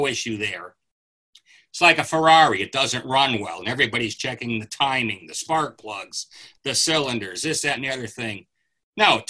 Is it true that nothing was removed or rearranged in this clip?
yes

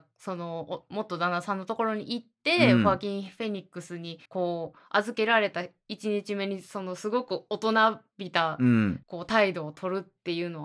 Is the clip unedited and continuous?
no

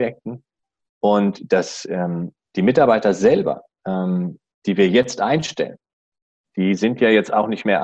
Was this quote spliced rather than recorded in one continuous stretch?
no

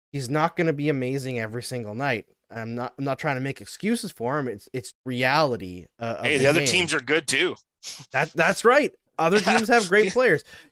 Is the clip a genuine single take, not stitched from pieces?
no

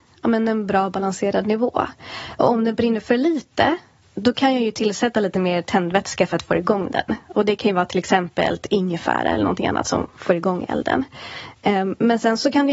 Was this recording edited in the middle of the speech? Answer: no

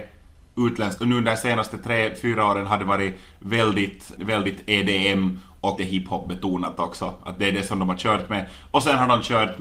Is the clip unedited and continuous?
no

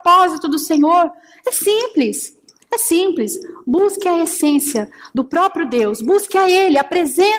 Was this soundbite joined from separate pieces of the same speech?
no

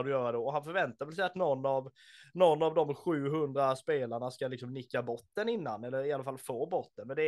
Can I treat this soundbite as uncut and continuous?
yes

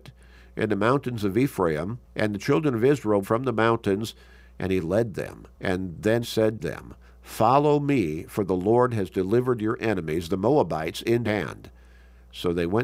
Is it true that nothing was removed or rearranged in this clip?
no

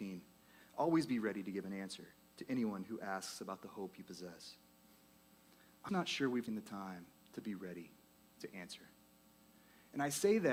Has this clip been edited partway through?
yes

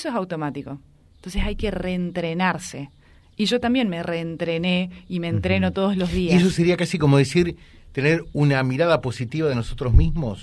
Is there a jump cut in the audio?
no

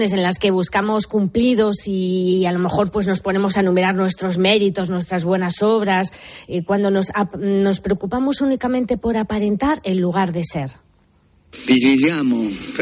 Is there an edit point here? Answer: no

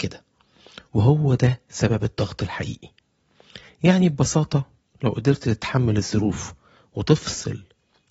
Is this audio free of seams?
yes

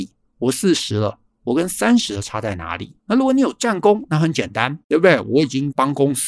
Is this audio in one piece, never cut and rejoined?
no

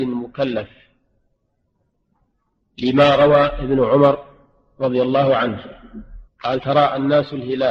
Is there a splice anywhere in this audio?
yes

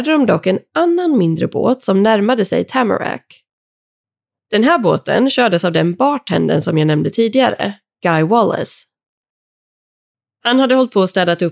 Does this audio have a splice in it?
no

